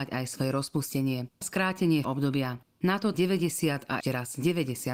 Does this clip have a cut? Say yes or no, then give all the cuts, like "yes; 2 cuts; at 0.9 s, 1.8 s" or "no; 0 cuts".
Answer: yes; 4 cuts; at 1.4 s, 2.0 s, 3.1 s, 4.0 s